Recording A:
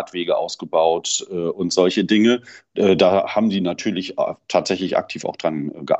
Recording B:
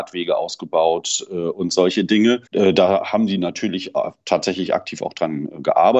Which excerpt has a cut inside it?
B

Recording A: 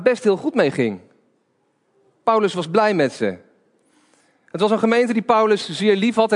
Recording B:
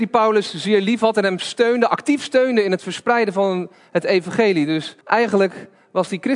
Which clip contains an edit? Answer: B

